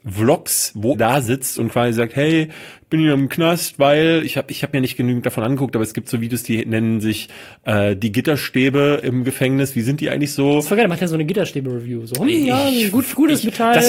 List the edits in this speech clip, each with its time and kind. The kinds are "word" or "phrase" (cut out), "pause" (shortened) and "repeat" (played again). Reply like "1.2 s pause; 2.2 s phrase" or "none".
0.9 s word